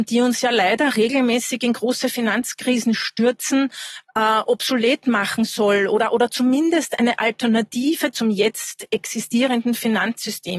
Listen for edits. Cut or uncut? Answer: uncut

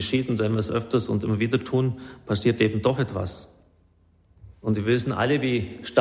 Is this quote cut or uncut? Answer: cut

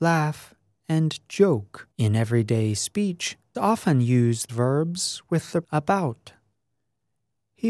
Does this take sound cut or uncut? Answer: cut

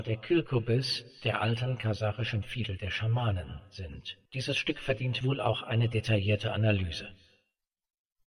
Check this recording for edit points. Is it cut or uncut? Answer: cut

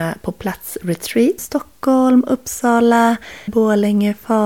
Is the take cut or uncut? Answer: cut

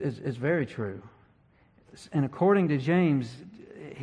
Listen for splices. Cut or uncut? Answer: uncut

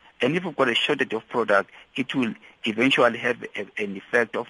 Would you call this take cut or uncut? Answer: uncut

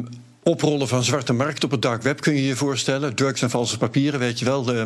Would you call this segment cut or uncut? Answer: uncut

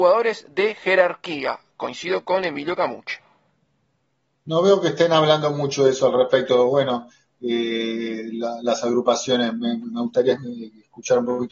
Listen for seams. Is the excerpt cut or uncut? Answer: uncut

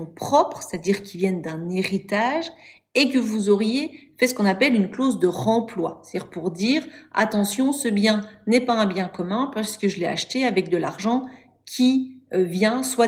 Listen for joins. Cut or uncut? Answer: uncut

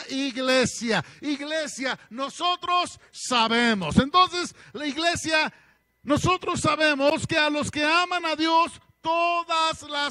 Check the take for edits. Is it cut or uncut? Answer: uncut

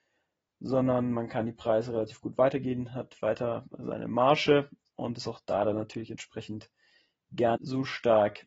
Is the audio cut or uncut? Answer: cut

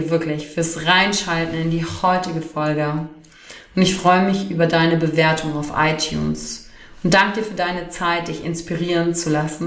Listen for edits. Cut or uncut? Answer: uncut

